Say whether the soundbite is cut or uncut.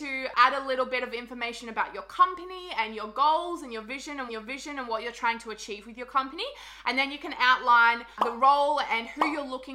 cut